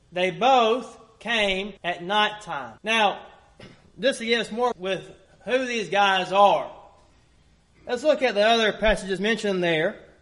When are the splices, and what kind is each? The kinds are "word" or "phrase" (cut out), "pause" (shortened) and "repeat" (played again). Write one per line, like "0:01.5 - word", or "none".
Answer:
0:01.8 - pause
0:02.8 - pause
0:04.7 - phrase